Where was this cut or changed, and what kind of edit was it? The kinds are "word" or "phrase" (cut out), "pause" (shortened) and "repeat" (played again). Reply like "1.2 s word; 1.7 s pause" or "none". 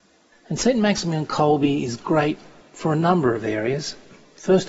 none